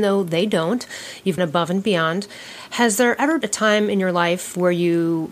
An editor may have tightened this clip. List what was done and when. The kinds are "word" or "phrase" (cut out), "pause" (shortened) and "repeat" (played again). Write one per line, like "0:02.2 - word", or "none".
0:01.4 - word
0:03.4 - word

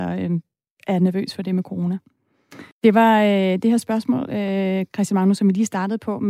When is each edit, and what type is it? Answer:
0:02.7 - pause

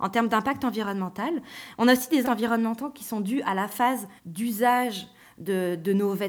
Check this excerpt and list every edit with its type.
0:02.2 - word
0:04.2 - pause

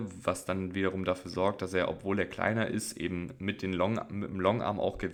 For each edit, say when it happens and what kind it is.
none

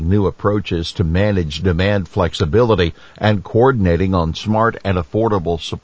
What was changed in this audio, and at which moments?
none

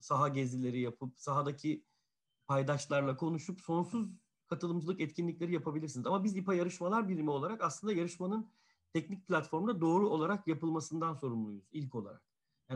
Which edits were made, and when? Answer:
none

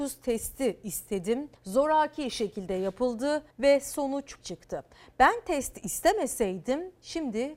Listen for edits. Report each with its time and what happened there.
0:01.6 - pause
0:03.5 - pause
0:04.4 - word

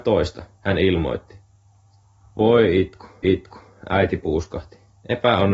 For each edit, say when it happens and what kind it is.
0:03.2 - repeat

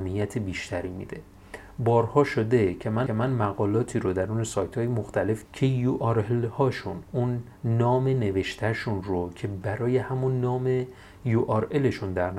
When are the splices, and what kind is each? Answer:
0:03.1 - repeat
0:05.5 - word
0:07.5 - pause

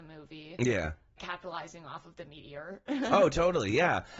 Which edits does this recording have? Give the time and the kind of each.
0:01.2 - phrase

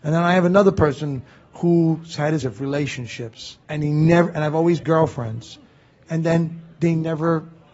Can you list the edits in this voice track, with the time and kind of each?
0:02.4 - word
0:03.6 - pause
0:04.8 - phrase

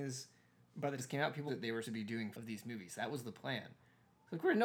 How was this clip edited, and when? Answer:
0:01.0 - word
0:01.5 - word
0:01.8 - word
0:02.3 - word

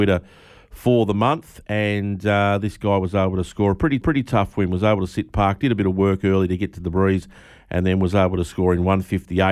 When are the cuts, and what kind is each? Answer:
0:04.0 - repeat

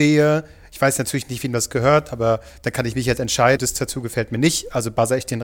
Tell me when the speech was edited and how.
0:03.6 - word

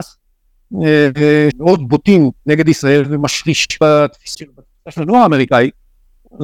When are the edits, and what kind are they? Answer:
0:01.5 - phrase
0:02.4 - pause
0:03.8 - word
0:04.3 - word

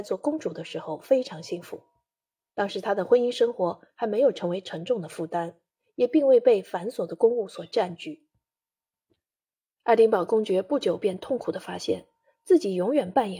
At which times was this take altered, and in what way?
none

